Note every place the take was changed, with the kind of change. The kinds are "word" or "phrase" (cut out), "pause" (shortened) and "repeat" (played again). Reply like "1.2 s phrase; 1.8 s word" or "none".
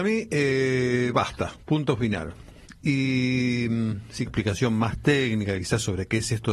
4.3 s phrase